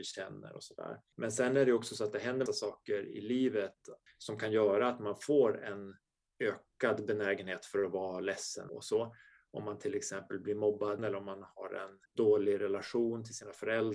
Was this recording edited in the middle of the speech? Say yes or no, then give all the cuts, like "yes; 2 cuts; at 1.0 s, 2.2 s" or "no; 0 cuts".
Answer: yes; 4 cuts; at 2.5 s, 8.7 s, 11.0 s, 12.1 s